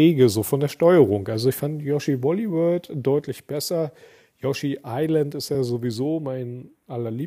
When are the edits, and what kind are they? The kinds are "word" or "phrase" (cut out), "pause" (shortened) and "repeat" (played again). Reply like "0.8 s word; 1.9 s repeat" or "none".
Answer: none